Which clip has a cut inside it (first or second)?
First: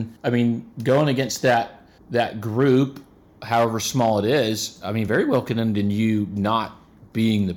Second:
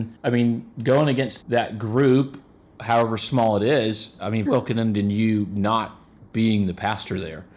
second